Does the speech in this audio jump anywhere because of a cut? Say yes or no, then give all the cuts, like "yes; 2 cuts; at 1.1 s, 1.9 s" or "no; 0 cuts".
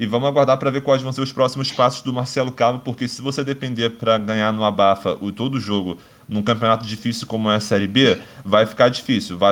no; 0 cuts